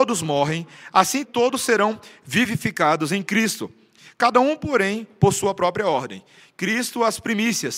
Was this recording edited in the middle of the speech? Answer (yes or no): yes